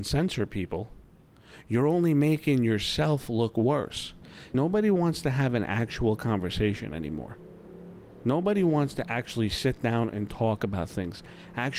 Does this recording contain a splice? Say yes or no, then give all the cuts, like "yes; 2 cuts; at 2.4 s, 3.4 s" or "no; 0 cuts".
no; 0 cuts